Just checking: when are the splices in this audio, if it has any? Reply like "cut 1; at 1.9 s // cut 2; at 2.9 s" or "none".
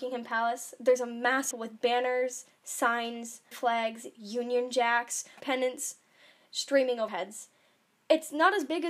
cut 1; at 1.5 s // cut 2; at 3.5 s // cut 3; at 5.4 s // cut 4; at 7.1 s